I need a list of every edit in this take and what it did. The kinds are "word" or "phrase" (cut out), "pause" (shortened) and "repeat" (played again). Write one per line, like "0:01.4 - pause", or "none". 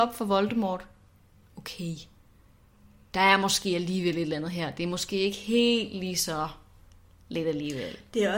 none